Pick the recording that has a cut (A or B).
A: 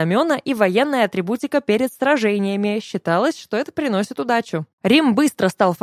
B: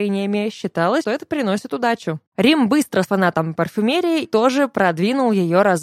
B